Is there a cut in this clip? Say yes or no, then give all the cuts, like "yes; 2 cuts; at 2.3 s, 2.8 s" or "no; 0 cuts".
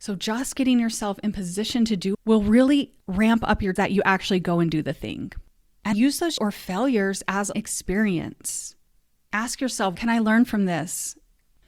yes; 6 cuts; at 2.1 s, 3.8 s, 5.9 s, 6.4 s, 7.5 s, 10.0 s